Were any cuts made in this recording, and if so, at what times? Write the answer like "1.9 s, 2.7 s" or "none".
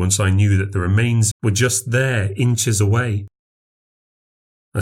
1.3 s

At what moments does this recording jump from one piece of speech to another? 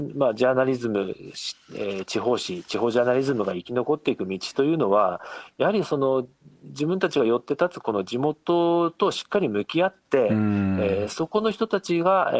none

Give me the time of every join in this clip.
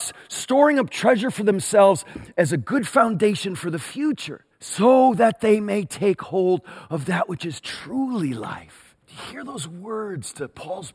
4.5 s, 9.0 s

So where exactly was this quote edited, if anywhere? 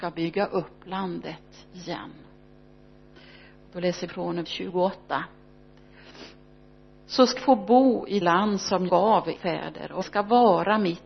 4.1 s, 4.4 s, 7.4 s, 8.2 s, 8.9 s, 9.3 s, 10.0 s

